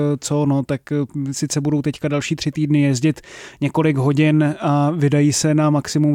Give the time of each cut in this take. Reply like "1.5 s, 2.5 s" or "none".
none